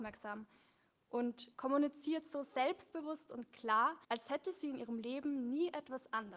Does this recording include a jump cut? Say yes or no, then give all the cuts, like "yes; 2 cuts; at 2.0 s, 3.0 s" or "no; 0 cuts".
yes; 2 cuts; at 1.5 s, 4.0 s